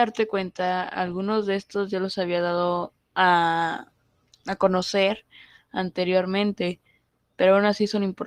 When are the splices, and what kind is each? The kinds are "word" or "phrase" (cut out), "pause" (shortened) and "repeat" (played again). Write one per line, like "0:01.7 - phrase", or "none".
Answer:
none